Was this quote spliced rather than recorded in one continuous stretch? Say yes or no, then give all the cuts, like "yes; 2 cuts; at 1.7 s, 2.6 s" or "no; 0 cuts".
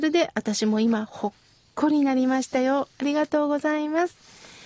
no; 0 cuts